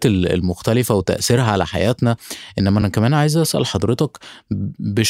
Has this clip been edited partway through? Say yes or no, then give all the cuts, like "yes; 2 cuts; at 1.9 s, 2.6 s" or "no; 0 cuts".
no; 0 cuts